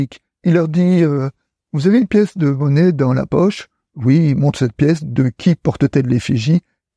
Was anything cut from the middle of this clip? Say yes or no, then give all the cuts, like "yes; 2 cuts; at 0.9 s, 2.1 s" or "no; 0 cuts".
no; 0 cuts